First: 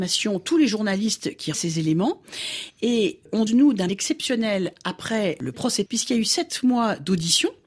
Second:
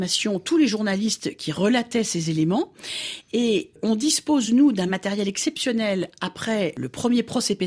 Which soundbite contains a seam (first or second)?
first